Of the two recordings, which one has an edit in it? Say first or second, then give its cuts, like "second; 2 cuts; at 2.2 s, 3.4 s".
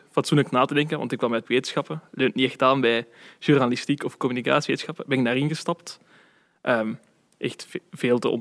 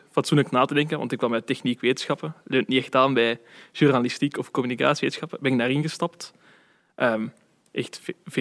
first; 1 cut; at 1.4 s